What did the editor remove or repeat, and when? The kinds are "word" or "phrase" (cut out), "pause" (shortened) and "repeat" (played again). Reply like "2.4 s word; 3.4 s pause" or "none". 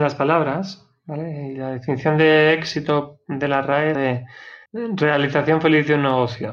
3.9 s word; 4.7 s pause